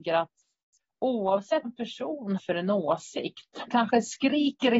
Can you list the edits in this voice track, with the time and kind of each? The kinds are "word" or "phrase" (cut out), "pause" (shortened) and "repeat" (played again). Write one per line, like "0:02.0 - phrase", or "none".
0:01.6 - word
0:02.4 - word
0:03.7 - word